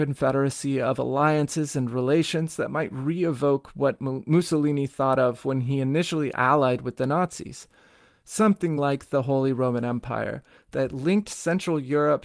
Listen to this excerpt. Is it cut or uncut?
uncut